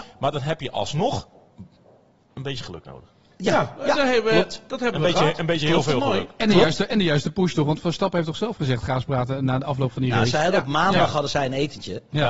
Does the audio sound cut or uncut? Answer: uncut